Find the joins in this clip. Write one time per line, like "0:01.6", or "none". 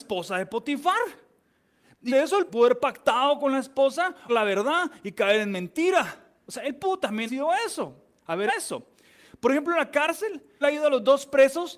0:02.1
0:02.5
0:04.3
0:07.3
0:08.5
0:10.6